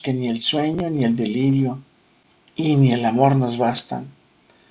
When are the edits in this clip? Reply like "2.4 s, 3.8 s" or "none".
none